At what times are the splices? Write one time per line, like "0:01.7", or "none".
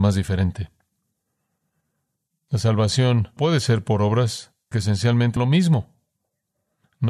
0:03.4
0:04.7
0:05.4